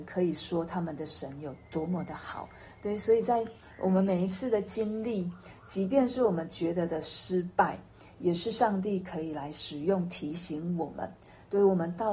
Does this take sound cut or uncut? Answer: uncut